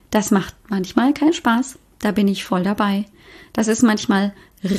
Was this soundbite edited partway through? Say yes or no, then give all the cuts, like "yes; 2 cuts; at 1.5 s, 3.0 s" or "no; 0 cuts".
no; 0 cuts